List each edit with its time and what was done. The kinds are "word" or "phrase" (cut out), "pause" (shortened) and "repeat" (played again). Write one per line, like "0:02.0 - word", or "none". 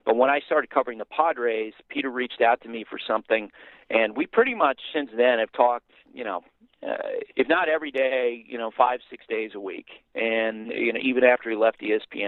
0:07.3 - pause